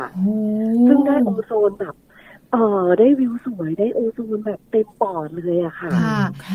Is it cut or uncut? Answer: uncut